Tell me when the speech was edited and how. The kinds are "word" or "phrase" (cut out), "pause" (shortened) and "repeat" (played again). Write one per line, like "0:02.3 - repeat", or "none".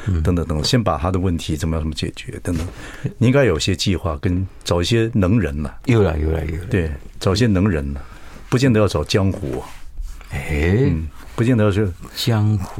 none